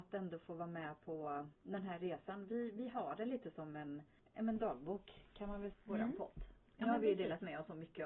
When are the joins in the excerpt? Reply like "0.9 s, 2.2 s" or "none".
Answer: 1.5 s, 5.7 s